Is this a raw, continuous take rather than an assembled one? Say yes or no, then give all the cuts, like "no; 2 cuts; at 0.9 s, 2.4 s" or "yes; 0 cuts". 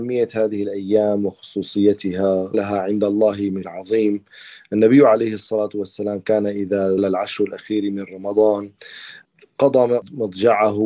no; 3 cuts; at 2.5 s, 3.6 s, 7.0 s